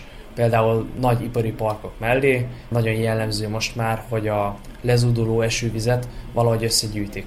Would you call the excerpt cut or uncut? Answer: uncut